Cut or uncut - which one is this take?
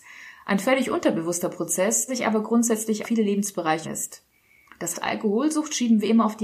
cut